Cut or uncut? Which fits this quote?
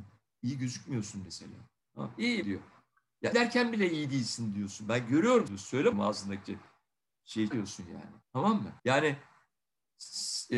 cut